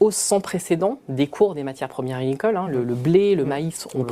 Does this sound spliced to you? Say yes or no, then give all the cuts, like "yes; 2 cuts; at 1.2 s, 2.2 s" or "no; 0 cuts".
no; 0 cuts